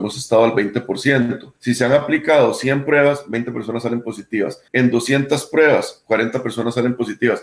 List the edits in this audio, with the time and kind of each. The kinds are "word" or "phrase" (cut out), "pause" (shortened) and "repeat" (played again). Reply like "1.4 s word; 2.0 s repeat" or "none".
1.6 s pause; 4.7 s pause